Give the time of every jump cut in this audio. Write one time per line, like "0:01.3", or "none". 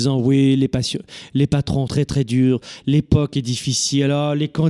0:01.9

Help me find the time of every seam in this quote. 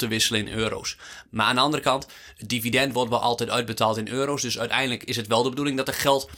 none

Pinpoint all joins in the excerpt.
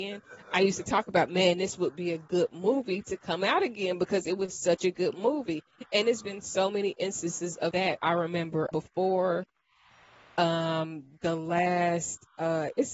0:07.7
0:08.7

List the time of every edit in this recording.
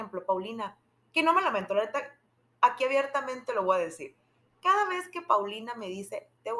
none

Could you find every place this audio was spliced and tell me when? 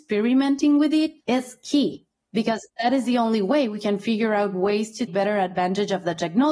0:01.2
0:05.1

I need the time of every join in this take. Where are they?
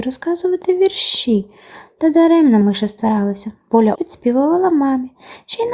0:02.6
0:03.9

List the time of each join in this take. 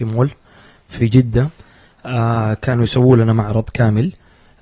none

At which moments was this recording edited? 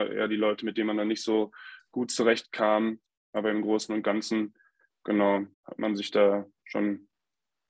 0:05.5

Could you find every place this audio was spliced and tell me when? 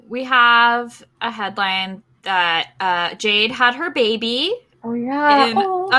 0:01.1

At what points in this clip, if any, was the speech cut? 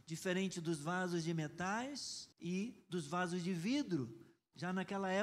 0:02.3

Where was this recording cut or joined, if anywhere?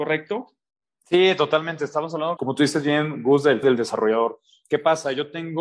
0:02.4
0:03.6

